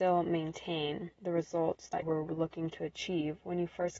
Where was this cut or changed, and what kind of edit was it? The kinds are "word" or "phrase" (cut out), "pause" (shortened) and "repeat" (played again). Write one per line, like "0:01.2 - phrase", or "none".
0:01.1 - pause
0:02.0 - word